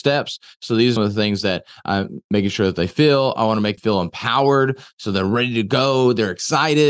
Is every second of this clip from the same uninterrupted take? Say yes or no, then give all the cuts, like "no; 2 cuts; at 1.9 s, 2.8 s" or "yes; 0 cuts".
no; 2 cuts; at 1.0 s, 3.8 s